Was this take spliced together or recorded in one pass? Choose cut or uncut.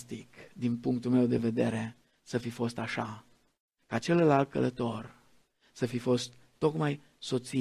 uncut